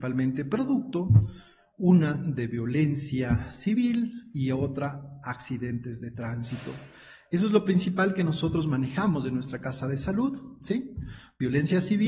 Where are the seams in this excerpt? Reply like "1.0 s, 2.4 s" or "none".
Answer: none